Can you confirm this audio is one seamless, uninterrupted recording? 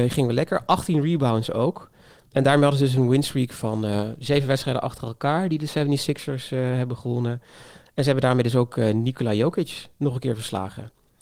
yes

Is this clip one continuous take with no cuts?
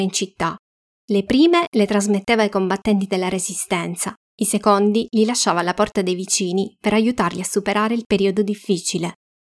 yes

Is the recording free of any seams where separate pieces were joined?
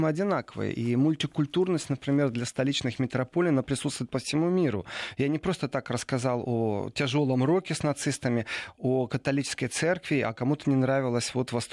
yes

